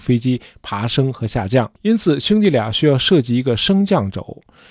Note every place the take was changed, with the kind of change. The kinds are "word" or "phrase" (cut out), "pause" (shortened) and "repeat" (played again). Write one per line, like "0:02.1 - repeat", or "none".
0:01.7 - pause